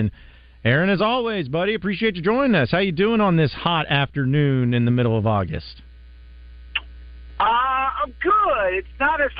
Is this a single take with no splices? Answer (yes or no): yes